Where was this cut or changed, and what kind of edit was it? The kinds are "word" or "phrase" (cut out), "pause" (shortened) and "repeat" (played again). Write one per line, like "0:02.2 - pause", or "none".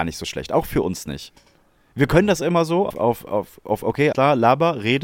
0:02.9 - word
0:04.1 - word